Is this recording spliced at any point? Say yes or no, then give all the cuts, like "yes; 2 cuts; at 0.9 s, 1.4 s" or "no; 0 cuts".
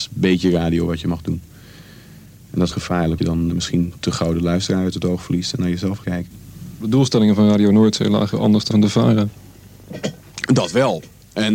yes; 6 cuts; at 2.7 s, 3.2 s, 3.5 s, 6.0 s, 8.3 s, 8.7 s